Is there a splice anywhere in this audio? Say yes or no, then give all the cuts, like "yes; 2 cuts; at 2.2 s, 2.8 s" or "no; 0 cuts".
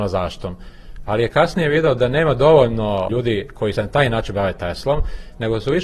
yes; 2 cuts; at 3.1 s, 3.8 s